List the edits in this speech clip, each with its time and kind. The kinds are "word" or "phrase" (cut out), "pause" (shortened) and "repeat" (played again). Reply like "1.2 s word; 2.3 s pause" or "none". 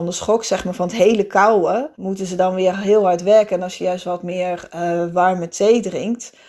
1.9 s pause